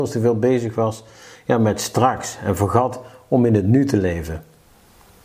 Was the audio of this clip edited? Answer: no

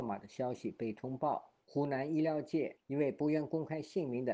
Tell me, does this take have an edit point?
yes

